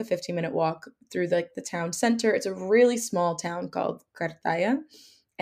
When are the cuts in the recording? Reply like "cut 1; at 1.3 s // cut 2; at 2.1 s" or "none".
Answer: none